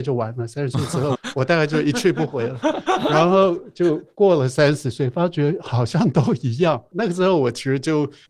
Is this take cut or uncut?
cut